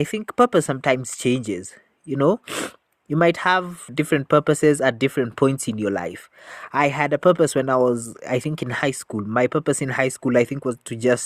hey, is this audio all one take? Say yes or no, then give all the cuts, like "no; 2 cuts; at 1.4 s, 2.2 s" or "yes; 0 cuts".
yes; 0 cuts